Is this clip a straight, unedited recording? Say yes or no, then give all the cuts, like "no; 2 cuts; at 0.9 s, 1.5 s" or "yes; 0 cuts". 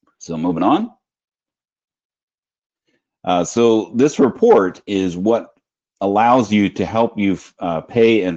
yes; 0 cuts